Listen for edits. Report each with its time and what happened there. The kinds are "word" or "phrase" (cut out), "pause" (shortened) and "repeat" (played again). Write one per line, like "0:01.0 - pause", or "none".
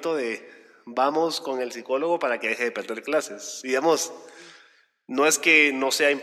none